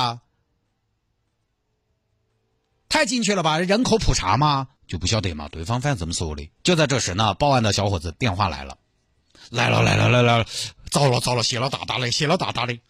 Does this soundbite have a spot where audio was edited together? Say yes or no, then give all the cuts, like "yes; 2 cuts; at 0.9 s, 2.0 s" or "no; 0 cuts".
yes; 2 cuts; at 4.8 s, 6.6 s